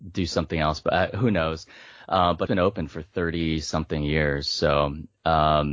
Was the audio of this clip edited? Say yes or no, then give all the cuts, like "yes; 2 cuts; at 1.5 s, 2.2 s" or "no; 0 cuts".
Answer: yes; 1 cut; at 2.5 s